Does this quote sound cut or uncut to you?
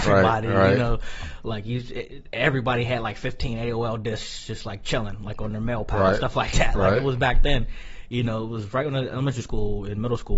uncut